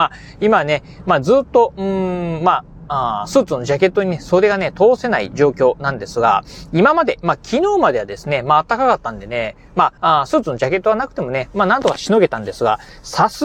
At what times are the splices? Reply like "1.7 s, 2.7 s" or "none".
10.0 s